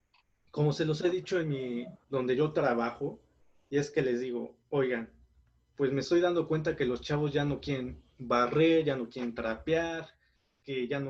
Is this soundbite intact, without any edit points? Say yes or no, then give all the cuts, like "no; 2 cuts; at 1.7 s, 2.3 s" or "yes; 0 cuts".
yes; 0 cuts